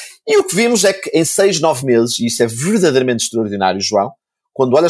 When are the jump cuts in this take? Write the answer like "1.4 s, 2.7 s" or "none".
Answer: none